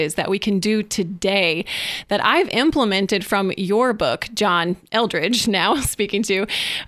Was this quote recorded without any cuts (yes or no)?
yes